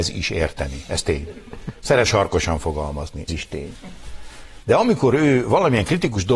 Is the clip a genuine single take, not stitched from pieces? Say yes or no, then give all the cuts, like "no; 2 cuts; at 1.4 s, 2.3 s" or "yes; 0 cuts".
no; 3 cuts; at 2.1 s, 3.3 s, 4.6 s